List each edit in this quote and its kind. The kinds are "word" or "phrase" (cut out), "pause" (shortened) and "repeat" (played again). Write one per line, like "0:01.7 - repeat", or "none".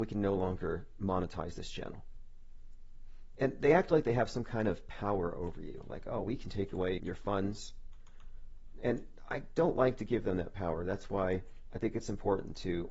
0:06.2 - word
0:07.0 - word